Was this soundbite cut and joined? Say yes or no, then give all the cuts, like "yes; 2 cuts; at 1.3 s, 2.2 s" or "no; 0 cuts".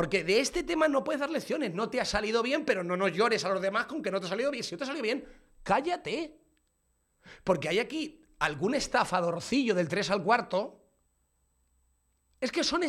no; 0 cuts